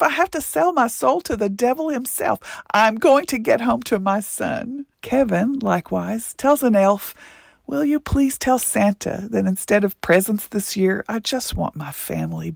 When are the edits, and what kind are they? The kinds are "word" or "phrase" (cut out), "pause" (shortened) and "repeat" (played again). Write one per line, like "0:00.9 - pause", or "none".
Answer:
0:04.9 - pause

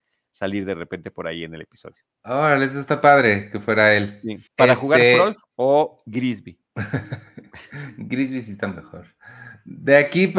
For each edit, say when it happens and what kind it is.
0:02.1 - pause
0:04.5 - pause
0:06.7 - pause

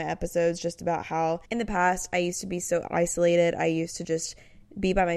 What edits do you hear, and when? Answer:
0:01.5 - pause

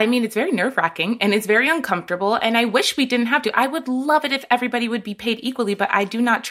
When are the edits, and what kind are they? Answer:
none

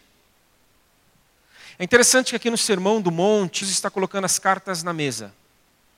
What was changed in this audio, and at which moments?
0:03.6 - word

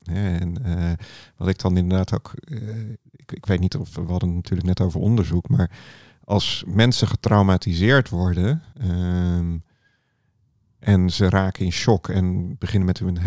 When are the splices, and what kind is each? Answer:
0:08.7 - pause

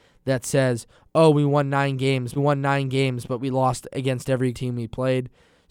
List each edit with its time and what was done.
0:02.4 - repeat
0:04.5 - word

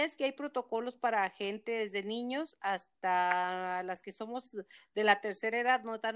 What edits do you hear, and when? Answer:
none

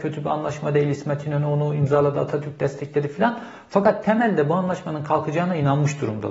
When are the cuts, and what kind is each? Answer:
none

